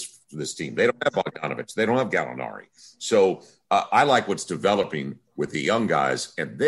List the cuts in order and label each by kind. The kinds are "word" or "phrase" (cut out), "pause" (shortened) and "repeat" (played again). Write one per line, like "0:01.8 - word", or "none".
none